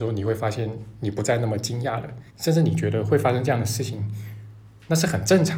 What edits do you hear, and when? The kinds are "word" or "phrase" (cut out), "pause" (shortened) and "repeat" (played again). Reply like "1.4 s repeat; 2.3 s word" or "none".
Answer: 2.3 s pause